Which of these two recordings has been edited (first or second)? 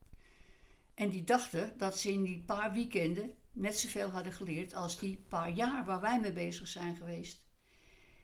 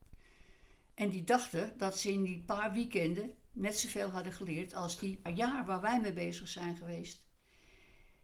second